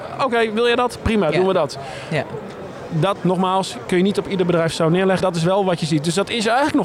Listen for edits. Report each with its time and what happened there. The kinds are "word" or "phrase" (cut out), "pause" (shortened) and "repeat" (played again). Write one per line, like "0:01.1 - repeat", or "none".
0:03.2 - word
0:05.2 - word